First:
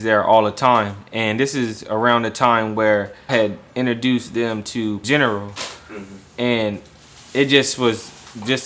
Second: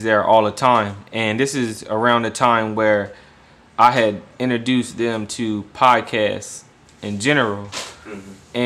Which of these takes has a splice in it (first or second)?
first